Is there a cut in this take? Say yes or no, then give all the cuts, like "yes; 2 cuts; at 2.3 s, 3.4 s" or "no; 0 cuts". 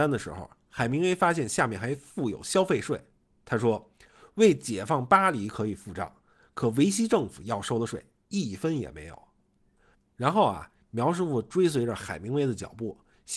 no; 0 cuts